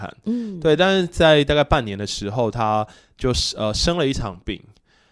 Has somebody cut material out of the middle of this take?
no; 0 cuts

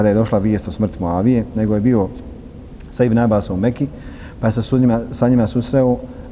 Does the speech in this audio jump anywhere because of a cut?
no; 0 cuts

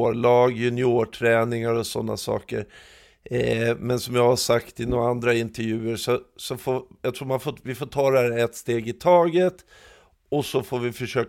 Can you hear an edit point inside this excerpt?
no; 0 cuts

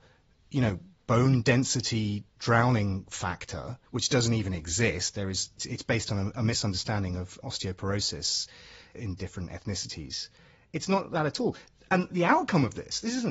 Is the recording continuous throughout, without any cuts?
no; 2 cuts; at 3.9 s, 5.6 s

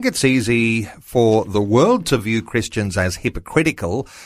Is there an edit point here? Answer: no; 0 cuts

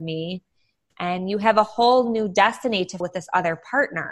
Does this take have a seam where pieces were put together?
yes; 1 cut; at 3.0 s

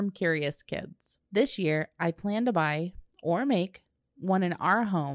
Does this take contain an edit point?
yes; 1 cut; at 1.2 s

